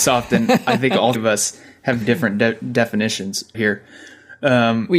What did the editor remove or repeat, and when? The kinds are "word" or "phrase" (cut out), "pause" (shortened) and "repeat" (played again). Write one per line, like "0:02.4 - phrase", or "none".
0:01.1 - word
0:02.0 - word
0:03.5 - word